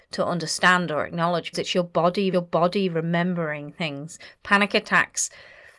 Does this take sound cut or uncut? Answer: cut